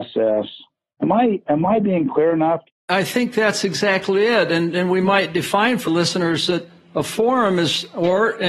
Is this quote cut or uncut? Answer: cut